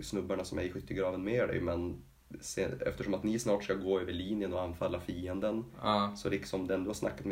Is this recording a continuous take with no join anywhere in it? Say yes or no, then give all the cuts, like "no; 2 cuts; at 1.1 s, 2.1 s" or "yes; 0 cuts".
yes; 0 cuts